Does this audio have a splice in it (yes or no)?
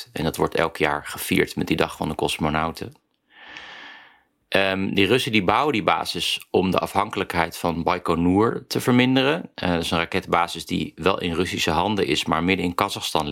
yes